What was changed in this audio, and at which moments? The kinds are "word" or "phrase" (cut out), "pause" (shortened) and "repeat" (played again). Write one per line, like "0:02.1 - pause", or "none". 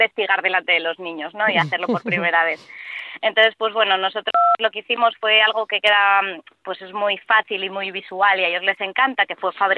none